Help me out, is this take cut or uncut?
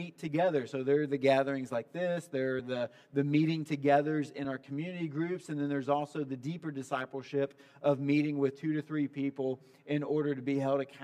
uncut